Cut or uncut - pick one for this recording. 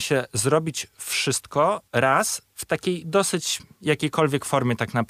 uncut